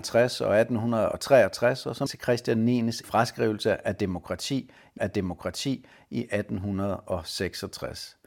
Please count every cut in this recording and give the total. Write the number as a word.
three